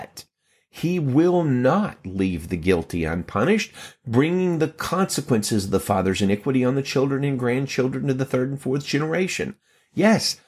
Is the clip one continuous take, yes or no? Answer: yes